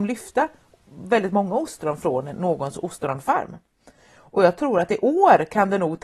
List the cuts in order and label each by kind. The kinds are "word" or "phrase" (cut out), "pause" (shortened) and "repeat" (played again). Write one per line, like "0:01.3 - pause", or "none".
none